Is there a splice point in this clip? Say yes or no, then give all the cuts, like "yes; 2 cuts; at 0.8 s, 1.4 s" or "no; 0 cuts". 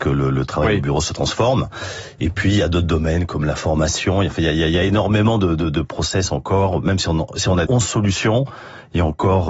yes; 1 cut; at 7.7 s